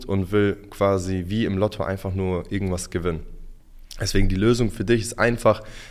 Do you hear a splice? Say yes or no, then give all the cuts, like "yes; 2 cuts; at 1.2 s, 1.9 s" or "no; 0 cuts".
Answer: no; 0 cuts